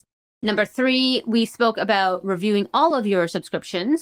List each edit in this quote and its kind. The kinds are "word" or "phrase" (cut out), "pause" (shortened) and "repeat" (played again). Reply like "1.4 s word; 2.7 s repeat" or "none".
none